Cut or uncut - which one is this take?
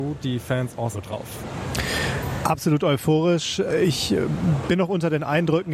cut